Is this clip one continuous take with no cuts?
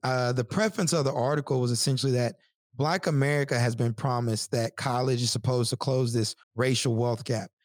no; 1 cut; at 6.4 s

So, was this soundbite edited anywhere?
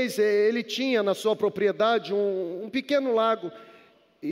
no; 0 cuts

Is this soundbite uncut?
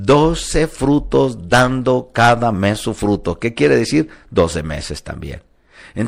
yes; 0 cuts

